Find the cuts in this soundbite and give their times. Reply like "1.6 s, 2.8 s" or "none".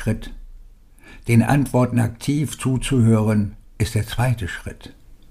3.6 s